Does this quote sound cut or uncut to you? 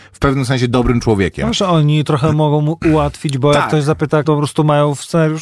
cut